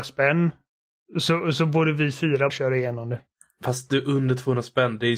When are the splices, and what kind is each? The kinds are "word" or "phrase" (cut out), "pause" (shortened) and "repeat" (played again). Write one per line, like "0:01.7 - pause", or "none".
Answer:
0:02.5 - word